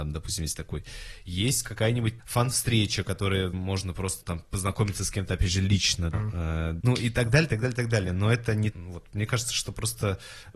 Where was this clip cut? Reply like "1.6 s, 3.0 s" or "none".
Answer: 2.2 s, 3.5 s, 4.2 s, 6.1 s, 6.8 s, 8.7 s